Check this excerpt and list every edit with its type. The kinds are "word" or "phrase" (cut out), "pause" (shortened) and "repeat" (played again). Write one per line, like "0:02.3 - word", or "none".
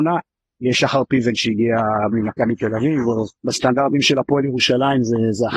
0:02.1 - word
0:03.3 - pause